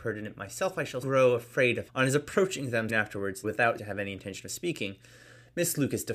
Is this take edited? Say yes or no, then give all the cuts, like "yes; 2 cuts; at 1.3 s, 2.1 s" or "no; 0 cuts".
yes; 5 cuts; at 1.0 s, 1.9 s, 2.9 s, 3.4 s, 3.8 s